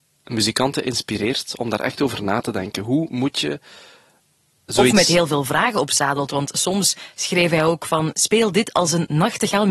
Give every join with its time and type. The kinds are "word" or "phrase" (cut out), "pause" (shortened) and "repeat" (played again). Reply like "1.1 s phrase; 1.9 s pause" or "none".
none